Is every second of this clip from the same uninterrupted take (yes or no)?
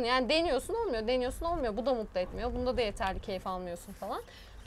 yes